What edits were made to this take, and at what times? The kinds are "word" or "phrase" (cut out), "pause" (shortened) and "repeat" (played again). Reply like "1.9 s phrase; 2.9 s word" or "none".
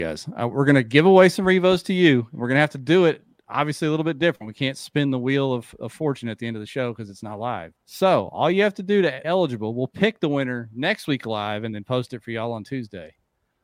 7.8 s pause; 9.2 s word